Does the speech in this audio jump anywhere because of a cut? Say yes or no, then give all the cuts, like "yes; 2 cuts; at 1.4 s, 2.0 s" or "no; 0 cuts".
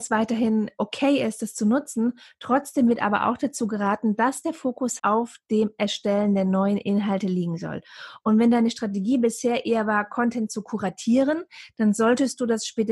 yes; 1 cut; at 5.0 s